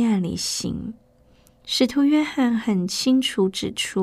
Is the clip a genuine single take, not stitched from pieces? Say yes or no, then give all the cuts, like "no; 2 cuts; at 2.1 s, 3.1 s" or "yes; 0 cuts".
yes; 0 cuts